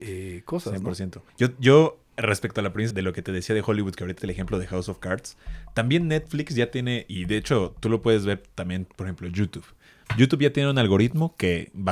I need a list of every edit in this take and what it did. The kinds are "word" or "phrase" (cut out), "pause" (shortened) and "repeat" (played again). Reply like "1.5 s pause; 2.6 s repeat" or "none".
1.3 s pause; 2.9 s word; 4.2 s word

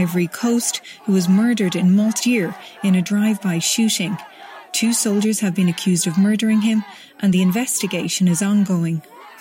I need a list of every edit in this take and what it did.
2.2 s word

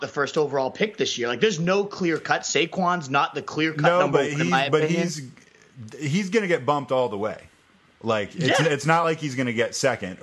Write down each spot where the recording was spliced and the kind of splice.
none

